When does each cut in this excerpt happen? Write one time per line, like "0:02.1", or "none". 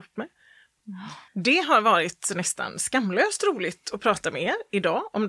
0:01.3